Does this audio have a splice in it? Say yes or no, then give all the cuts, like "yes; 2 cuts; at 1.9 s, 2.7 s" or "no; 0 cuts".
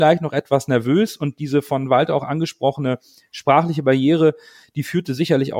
no; 0 cuts